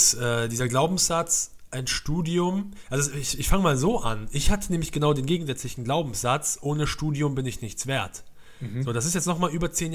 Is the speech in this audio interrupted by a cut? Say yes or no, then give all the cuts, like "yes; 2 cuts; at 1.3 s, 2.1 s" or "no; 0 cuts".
no; 0 cuts